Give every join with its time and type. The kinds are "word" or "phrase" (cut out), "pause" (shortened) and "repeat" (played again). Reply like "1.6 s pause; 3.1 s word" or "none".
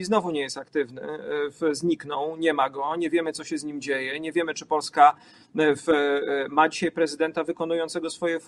none